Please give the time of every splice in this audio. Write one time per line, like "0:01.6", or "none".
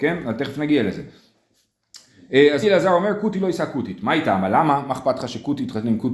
0:02.6